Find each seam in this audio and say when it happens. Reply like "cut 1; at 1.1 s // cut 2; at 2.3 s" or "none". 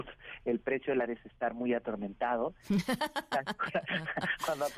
cut 1; at 1.1 s